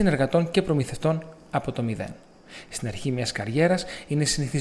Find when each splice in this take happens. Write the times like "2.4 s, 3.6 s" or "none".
none